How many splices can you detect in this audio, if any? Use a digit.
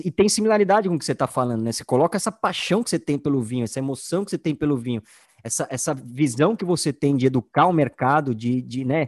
0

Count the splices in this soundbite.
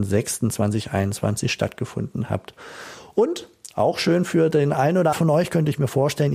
1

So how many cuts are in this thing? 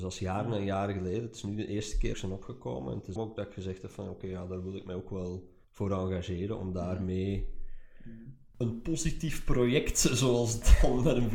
3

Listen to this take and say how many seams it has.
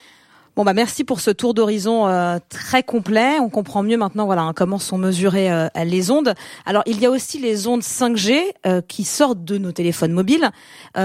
0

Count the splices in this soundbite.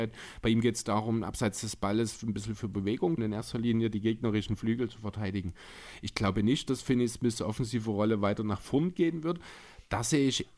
1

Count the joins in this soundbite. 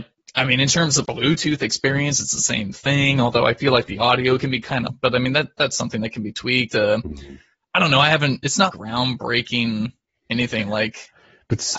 3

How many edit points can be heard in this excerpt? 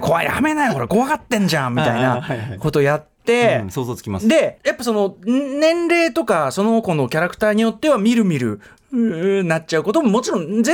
1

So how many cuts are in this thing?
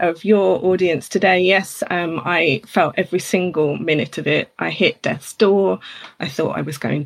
0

